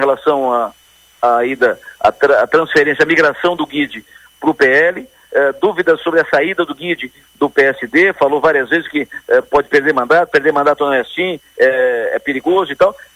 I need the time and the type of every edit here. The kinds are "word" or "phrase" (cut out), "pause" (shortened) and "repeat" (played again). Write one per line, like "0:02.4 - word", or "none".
none